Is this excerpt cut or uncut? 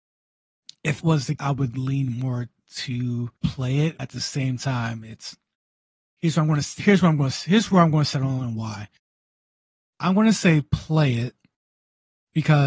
cut